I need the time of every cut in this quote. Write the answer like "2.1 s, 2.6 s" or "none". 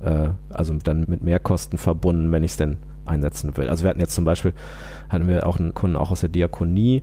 1.0 s, 5.7 s

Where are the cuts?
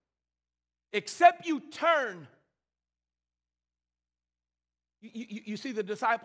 none

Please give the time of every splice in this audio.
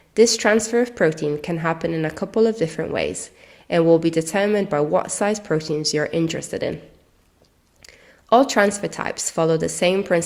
none

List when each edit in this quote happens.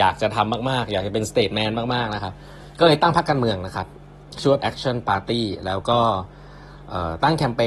4.6 s

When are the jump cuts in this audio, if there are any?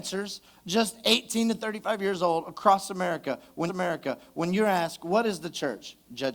3.7 s

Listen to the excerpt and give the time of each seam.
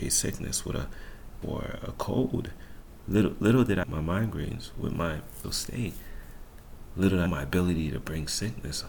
1.4 s, 3.8 s, 5.4 s, 7.3 s

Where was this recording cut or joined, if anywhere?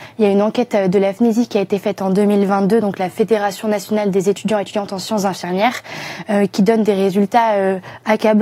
none

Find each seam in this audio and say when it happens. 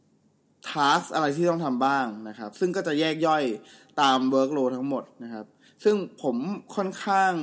none

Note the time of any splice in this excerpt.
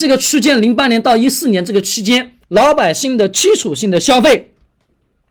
2.4 s

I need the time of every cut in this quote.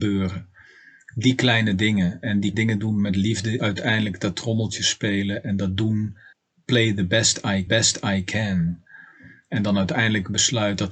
2.5 s, 3.6 s, 6.3 s, 7.7 s

